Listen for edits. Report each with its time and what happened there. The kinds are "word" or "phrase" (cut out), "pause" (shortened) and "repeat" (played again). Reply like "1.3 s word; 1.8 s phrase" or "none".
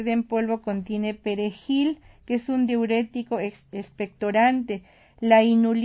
none